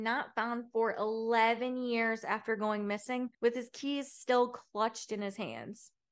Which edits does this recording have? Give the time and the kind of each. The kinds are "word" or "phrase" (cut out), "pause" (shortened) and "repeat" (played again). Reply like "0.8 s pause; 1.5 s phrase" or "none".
3.3 s pause